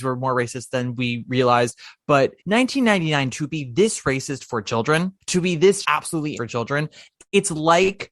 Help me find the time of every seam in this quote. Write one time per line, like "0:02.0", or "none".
0:02.4
0:05.2
0:05.8
0:06.3